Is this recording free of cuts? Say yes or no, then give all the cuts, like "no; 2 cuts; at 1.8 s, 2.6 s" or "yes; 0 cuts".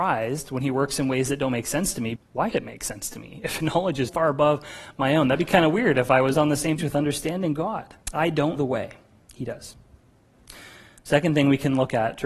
no; 8 cuts; at 2.2 s, 2.5 s, 3.6 s, 4.1 s, 6.3 s, 6.8 s, 8.0 s, 8.6 s